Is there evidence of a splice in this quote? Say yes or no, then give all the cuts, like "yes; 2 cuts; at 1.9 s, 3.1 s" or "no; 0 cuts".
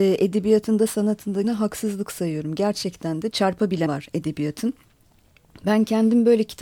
yes; 3 cuts; at 1.4 s, 3.3 s, 3.9 s